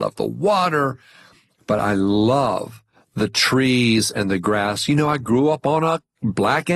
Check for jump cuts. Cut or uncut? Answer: uncut